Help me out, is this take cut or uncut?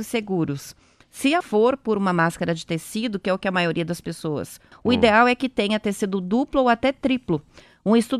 cut